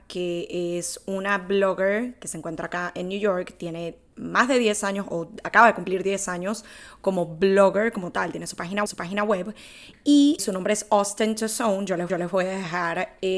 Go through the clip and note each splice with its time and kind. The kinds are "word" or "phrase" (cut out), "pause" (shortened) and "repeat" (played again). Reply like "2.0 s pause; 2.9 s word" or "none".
8.9 s repeat; 10.4 s word; 12.1 s repeat

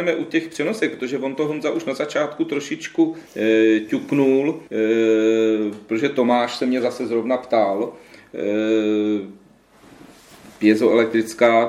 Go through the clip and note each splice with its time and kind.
3.3 s pause; 4.7 s pause; 10.6 s pause

